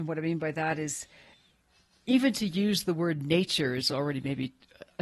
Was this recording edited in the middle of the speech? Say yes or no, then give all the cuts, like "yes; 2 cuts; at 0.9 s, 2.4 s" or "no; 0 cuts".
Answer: no; 0 cuts